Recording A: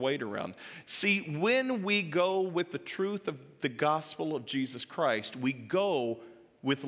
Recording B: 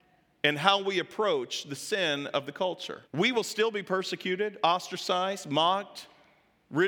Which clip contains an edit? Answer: B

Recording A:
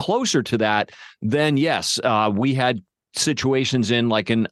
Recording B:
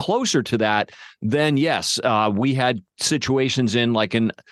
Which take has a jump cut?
B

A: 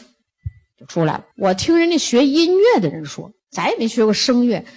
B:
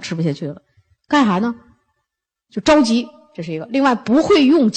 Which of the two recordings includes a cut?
A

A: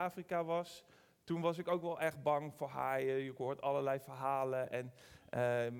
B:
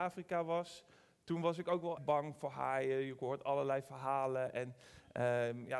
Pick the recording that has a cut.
B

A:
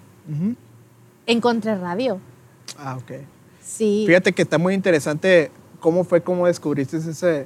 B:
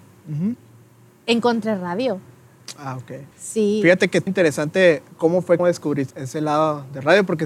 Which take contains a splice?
B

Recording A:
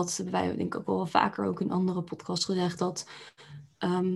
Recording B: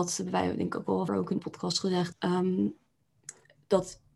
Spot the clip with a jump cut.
B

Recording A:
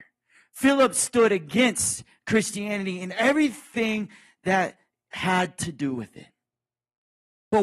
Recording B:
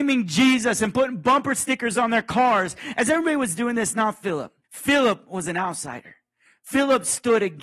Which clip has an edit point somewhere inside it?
B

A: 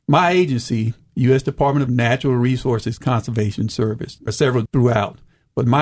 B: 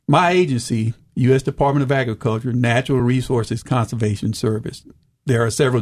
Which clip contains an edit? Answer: A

